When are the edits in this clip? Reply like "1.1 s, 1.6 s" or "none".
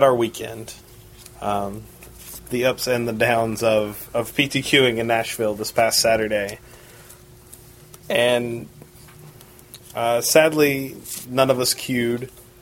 1.3 s, 8.0 s